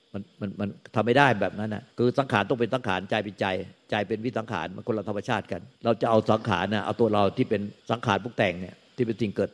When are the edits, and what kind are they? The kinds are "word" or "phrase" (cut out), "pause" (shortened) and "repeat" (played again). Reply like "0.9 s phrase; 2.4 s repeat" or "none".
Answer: 1.9 s pause; 5.7 s pause; 7.8 s pause